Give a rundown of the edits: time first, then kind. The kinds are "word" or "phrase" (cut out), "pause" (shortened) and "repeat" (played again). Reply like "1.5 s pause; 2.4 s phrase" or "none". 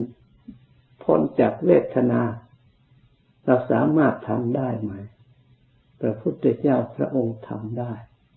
none